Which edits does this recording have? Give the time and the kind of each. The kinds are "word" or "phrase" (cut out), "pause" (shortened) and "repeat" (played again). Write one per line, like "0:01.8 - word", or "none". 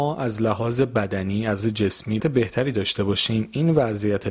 0:01.6 - word
0:02.2 - word

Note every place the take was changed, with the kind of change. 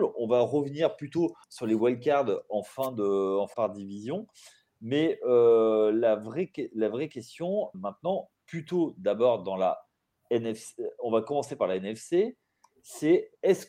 0:01.4 - pause
0:03.5 - phrase
0:07.7 - word

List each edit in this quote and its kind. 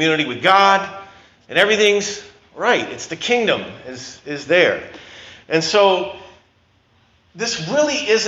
none

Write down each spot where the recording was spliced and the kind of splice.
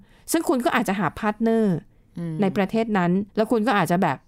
0:03.3 - pause

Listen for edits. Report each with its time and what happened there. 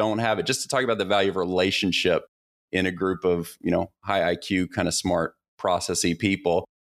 none

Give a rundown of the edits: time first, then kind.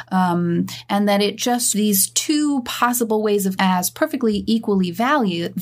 0:01.7 - phrase
0:03.6 - word

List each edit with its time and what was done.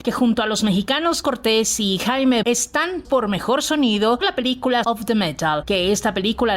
0:01.2 - word
0:02.4 - word
0:03.0 - word
0:04.2 - word
0:04.8 - word

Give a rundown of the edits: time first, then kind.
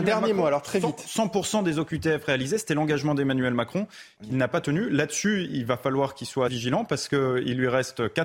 0:06.5 - word

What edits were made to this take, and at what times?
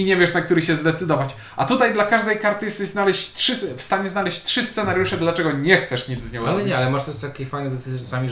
none

